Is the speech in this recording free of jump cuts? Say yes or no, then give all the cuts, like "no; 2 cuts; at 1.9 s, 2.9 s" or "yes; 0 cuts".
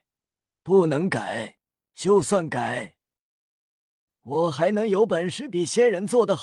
yes; 0 cuts